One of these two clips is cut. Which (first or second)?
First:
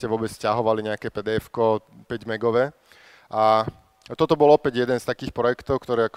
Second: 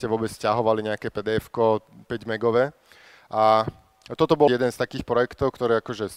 second